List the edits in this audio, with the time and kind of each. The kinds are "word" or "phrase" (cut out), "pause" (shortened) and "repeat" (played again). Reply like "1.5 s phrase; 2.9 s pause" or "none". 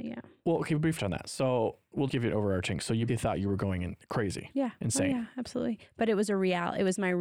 1.0 s word; 2.1 s word; 3.1 s word